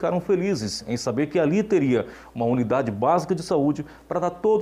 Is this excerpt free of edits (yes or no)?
yes